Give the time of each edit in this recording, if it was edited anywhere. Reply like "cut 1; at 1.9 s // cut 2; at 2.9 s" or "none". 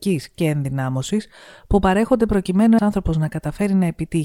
cut 1; at 2.8 s

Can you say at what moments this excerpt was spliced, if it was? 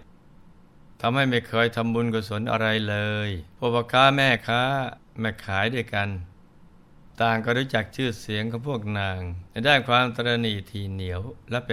cut 1; at 3.5 s // cut 2; at 9.5 s

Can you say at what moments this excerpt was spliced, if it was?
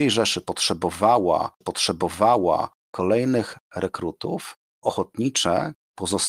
cut 1; at 1.6 s // cut 2; at 4.8 s

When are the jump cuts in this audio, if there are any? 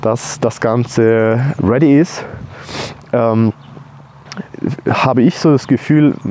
cut 1; at 1.6 s

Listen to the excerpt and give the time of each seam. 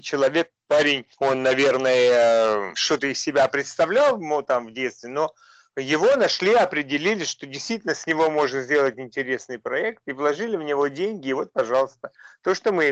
none

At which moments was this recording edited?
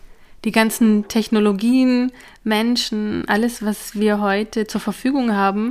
none

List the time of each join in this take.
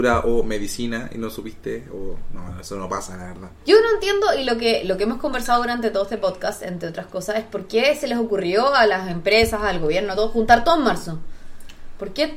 cut 1; at 3.5 s

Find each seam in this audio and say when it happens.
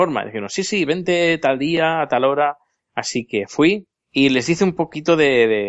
none

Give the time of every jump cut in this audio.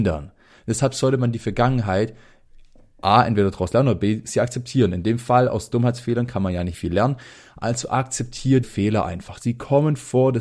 cut 1; at 6.7 s // cut 2; at 8.6 s

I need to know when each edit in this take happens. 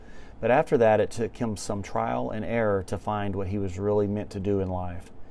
none

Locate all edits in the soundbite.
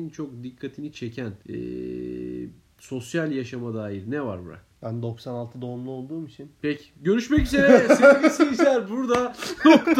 cut 1; at 1.4 s // cut 2; at 4.8 s

